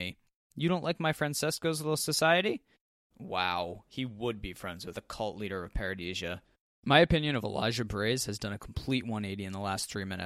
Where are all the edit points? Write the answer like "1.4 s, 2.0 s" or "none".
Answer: 1.1 s, 4.9 s